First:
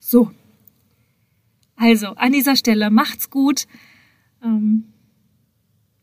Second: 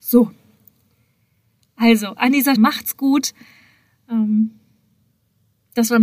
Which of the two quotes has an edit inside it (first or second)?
second